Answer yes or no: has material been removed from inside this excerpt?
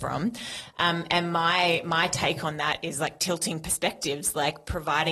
no